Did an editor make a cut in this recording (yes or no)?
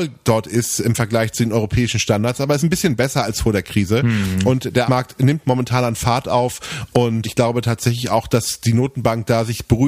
yes